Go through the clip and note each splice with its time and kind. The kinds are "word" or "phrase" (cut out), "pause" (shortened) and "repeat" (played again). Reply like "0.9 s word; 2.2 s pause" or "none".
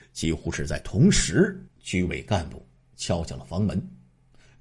1.7 s pause